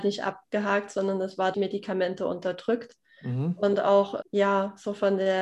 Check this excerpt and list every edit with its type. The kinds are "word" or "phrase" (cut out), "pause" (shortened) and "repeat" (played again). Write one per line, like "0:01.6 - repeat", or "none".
0:01.5 - word
0:04.2 - word